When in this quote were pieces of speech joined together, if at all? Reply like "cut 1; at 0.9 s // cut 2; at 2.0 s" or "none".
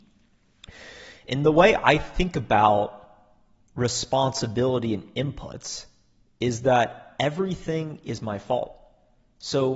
none

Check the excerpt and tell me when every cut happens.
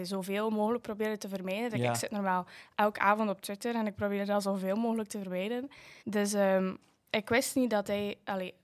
cut 1; at 6.0 s

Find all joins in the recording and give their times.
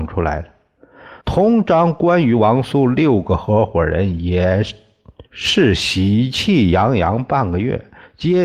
cut 1; at 1.2 s // cut 2; at 5.3 s

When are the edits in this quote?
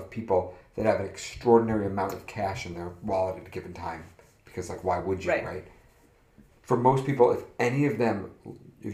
none

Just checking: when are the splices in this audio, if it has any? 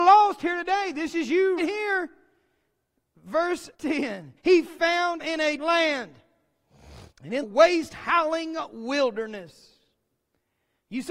cut 1; at 1.6 s // cut 2; at 3.7 s // cut 3; at 4.4 s // cut 4; at 5.2 s // cut 5; at 5.6 s // cut 6; at 7.1 s // cut 7; at 7.4 s

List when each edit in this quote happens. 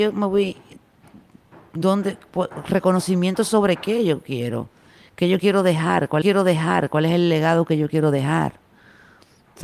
cut 1; at 6.2 s

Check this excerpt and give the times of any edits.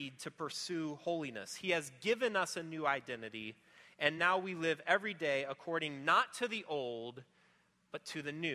none

